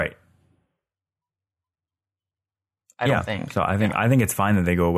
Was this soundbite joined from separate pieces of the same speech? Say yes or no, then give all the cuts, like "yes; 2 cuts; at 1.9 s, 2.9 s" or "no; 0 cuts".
no; 0 cuts